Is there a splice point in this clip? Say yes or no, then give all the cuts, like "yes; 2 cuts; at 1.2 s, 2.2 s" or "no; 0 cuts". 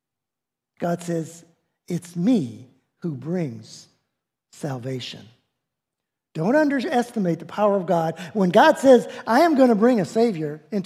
no; 0 cuts